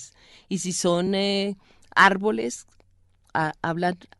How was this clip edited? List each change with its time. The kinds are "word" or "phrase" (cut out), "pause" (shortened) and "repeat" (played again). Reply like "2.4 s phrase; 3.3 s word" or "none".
none